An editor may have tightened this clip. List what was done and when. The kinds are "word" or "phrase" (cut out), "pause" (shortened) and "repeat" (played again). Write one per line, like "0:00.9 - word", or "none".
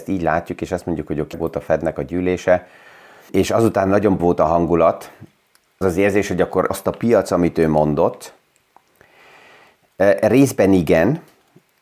0:01.3 - word
0:03.3 - word
0:04.2 - word
0:05.8 - word
0:06.7 - word